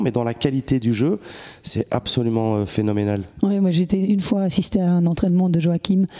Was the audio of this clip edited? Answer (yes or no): no